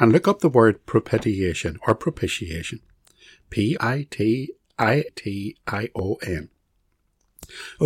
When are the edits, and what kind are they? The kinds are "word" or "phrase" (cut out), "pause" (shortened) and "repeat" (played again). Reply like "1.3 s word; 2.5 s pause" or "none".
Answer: 3.8 s phrase; 5.1 s word